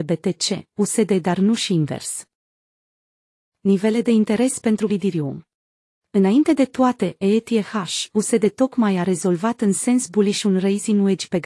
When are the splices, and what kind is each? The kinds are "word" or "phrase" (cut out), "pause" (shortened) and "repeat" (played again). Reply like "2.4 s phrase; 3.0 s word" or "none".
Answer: 4.9 s word